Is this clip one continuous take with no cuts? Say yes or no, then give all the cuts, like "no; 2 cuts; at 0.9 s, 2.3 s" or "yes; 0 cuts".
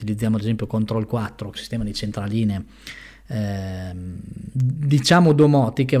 no; 1 cut; at 1.6 s